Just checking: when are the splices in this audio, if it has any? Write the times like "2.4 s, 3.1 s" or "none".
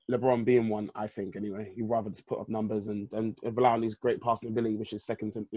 none